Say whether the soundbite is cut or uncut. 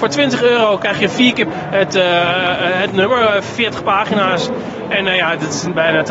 cut